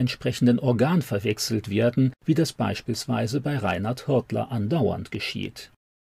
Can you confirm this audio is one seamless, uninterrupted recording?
yes; 0 cuts

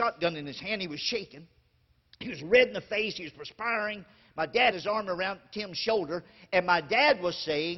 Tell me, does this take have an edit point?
yes; 1 cut; at 4.7 s

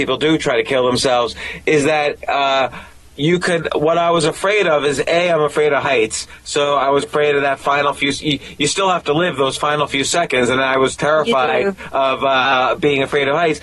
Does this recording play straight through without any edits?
no; 1 cut; at 7.0 s

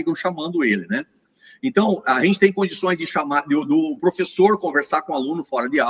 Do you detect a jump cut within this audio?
no; 0 cuts

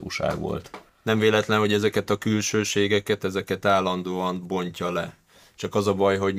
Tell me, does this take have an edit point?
no; 0 cuts

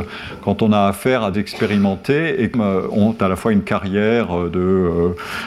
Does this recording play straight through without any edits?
no; 2 cuts; at 1.3 s, 2.5 s

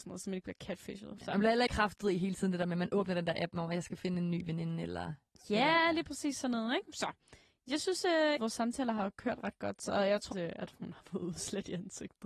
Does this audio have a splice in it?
yes; 3 cuts; at 1.7 s, 8.4 s, 10.3 s

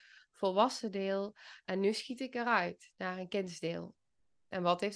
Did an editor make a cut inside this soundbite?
no; 0 cuts

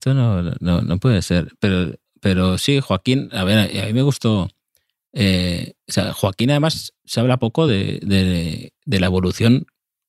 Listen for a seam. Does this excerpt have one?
no; 0 cuts

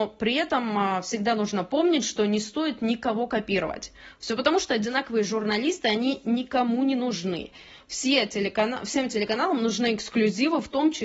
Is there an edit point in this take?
no; 0 cuts

